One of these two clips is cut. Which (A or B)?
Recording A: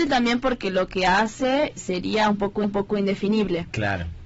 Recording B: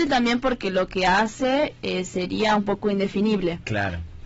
A